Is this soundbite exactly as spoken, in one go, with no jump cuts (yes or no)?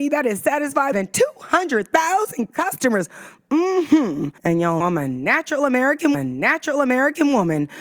no